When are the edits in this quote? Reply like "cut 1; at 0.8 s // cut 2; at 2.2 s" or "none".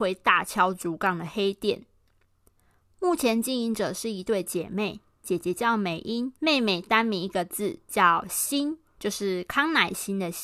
cut 1; at 6.3 s

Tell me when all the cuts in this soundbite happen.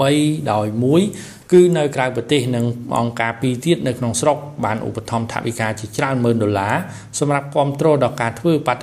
cut 1; at 1.4 s

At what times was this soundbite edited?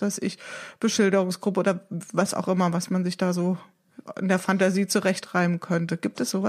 none

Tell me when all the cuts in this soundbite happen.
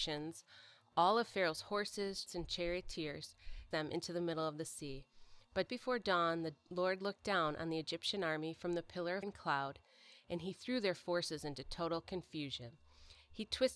cut 1; at 2.3 s // cut 2; at 3.7 s // cut 3; at 5.7 s // cut 4; at 9.2 s

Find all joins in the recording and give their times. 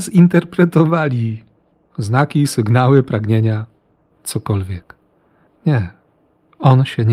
none

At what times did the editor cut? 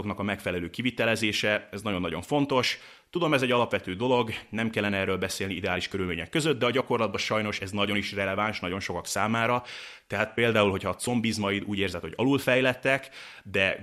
none

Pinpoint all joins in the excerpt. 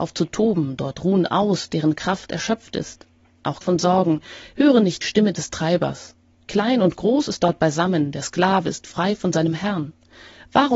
cut 1; at 3.6 s // cut 2; at 5.0 s

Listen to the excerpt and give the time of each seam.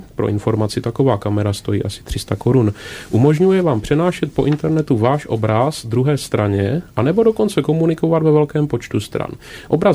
none

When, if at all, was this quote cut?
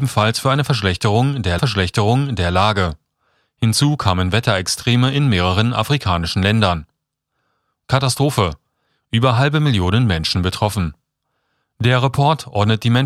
cut 1; at 1.6 s

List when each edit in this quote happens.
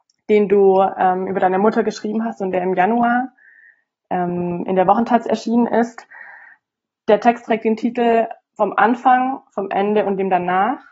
none

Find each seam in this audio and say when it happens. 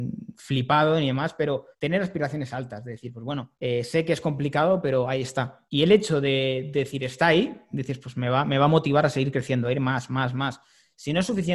cut 1; at 1.7 s // cut 2; at 3.6 s // cut 3; at 5.7 s

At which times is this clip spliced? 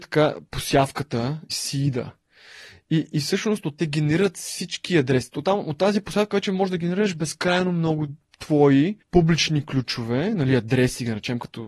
cut 1; at 1.5 s // cut 2; at 3.8 s // cut 3; at 9.0 s

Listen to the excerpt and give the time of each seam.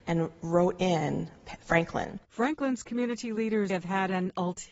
cut 1; at 3.7 s

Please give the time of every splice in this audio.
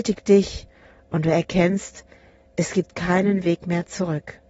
none

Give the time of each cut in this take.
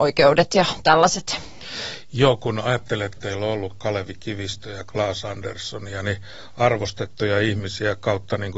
cut 1; at 3.2 s

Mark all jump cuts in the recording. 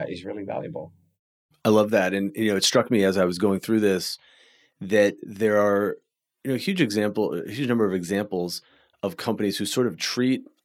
none

